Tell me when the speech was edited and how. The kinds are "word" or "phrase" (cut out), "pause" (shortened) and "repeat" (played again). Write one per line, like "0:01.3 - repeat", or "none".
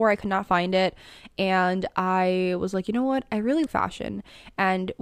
0:03.7 - word